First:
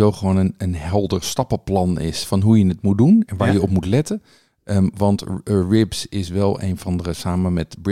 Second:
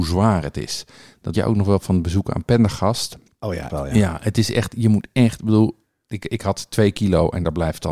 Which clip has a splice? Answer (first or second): second